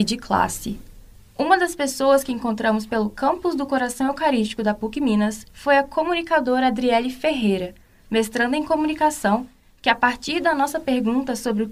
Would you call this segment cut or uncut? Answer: uncut